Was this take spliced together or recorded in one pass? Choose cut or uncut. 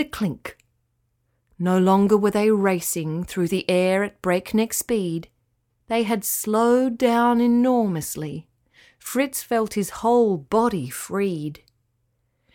uncut